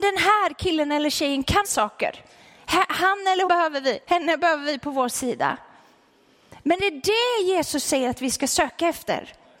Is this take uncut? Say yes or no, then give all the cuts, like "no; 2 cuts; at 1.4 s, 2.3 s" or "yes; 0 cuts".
no; 4 cuts; at 1.6 s, 3.5 s, 4.0 s, 6.8 s